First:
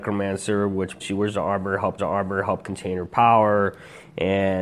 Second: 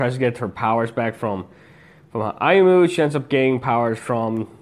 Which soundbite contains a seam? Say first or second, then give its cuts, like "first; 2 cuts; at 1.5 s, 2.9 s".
first; 2 cuts; at 1.0 s, 2.0 s